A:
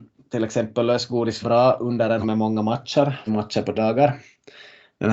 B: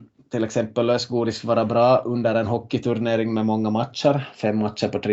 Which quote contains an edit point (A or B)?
A